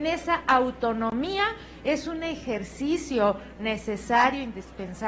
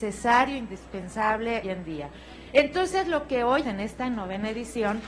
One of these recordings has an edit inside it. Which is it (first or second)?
second